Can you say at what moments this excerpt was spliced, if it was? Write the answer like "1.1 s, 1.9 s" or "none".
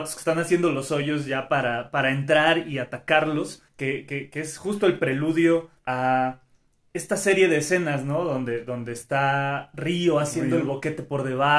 3.7 s, 5.8 s